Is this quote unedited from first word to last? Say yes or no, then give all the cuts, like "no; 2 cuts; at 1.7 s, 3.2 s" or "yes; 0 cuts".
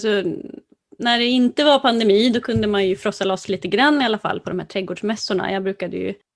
yes; 0 cuts